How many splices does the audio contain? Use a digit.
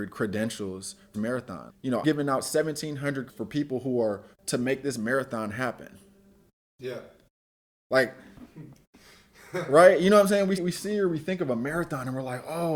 6